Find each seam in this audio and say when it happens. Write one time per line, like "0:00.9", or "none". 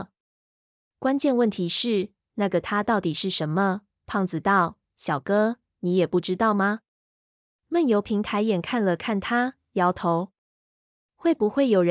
none